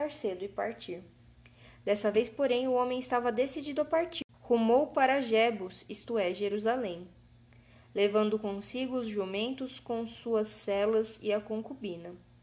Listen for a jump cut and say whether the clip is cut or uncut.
cut